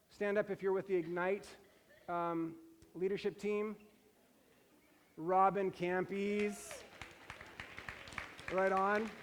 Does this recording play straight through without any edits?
yes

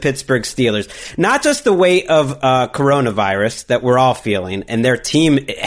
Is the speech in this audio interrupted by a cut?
no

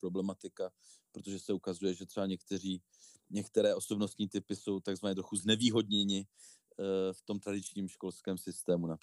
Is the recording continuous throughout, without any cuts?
yes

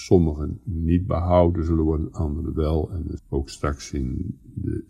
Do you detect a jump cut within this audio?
yes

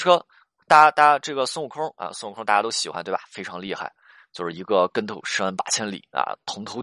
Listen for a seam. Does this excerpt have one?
no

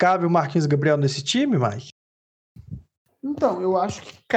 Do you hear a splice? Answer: no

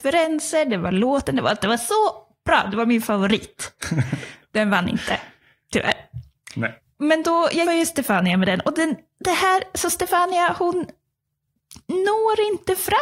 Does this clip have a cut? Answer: yes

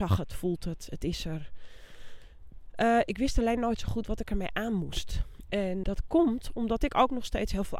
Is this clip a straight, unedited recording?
no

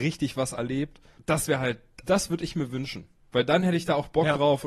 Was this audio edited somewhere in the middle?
yes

